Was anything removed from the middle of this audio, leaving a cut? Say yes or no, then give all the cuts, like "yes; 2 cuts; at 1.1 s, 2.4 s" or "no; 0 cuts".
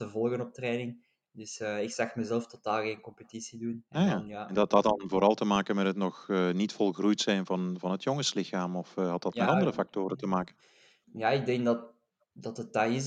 no; 0 cuts